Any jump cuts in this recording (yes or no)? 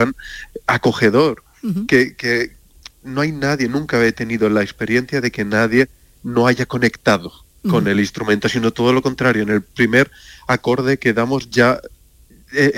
no